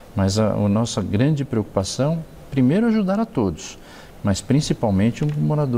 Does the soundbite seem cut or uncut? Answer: uncut